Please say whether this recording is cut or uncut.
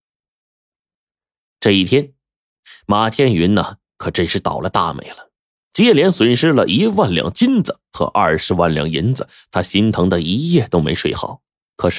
uncut